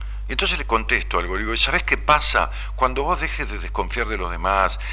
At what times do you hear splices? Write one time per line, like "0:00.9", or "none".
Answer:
none